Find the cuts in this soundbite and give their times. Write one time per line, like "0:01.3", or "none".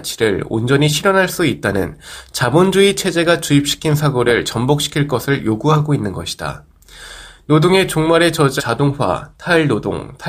0:08.6

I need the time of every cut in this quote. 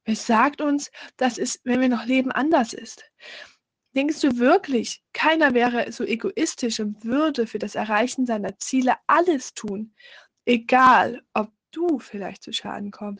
none

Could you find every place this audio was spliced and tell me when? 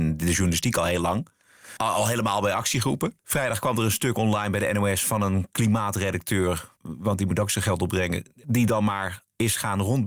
0:03.2
0:06.8

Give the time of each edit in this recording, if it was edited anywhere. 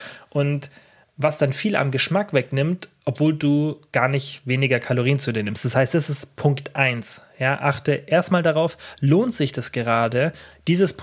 none

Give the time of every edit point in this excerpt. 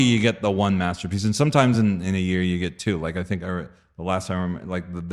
none

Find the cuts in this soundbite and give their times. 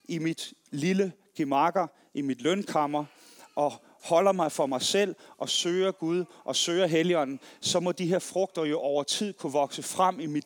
none

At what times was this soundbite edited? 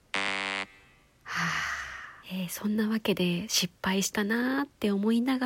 0:02.2

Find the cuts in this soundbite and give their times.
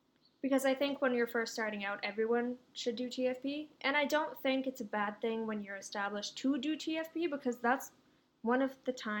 none

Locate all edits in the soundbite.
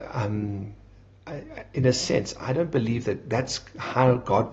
none

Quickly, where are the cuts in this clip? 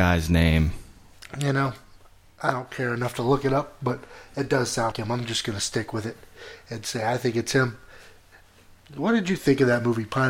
0:04.9

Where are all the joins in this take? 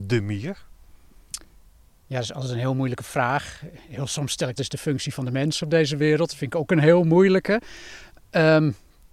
0:04.6

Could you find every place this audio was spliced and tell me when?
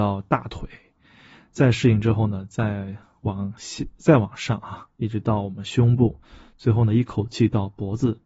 none

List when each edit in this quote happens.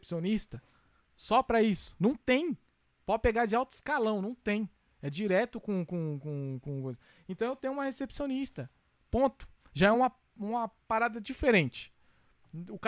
none

